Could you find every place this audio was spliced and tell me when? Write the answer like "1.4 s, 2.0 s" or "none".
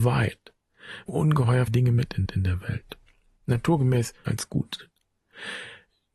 1.1 s, 1.7 s, 2.3 s, 4.2 s